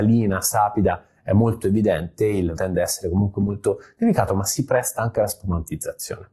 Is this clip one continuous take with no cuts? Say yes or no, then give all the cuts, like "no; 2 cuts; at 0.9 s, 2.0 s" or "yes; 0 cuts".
no; 1 cut; at 2.6 s